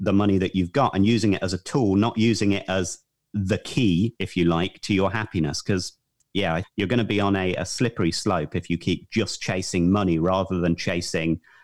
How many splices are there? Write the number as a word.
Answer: one